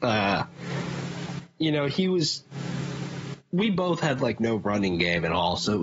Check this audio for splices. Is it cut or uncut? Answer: uncut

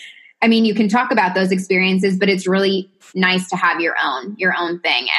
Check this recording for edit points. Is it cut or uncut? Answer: uncut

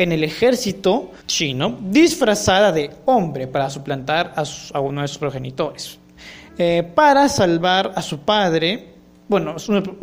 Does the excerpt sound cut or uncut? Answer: cut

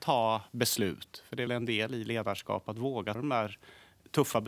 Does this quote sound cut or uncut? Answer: cut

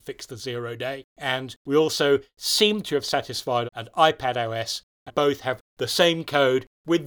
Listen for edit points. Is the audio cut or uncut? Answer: cut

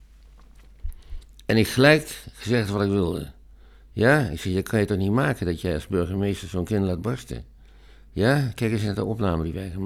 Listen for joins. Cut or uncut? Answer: uncut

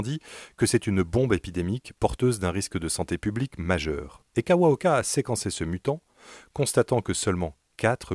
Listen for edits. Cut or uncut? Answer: cut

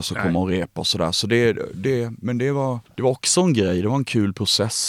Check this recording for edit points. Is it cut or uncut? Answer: uncut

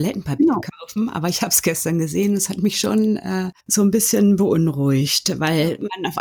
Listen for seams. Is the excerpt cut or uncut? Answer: cut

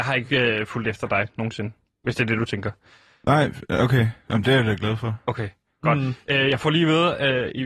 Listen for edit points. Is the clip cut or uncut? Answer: uncut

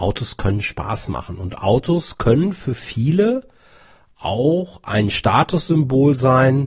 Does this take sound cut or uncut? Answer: uncut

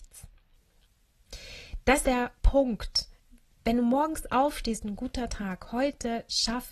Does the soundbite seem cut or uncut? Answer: cut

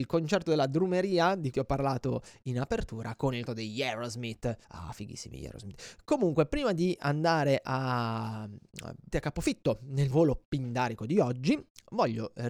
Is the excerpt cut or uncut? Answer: cut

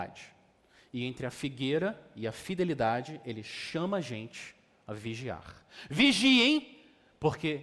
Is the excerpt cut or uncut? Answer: uncut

